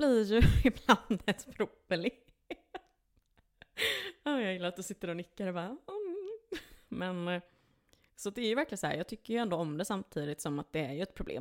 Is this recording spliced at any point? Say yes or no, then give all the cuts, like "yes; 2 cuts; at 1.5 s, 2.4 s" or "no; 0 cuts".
no; 0 cuts